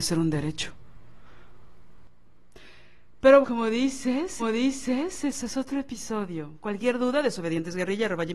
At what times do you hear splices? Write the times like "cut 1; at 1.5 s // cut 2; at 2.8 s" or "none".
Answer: cut 1; at 3.4 s // cut 2; at 4.4 s